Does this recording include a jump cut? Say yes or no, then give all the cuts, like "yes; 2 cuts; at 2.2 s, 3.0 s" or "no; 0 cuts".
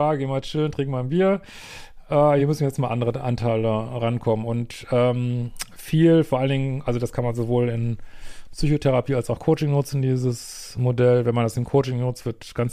no; 0 cuts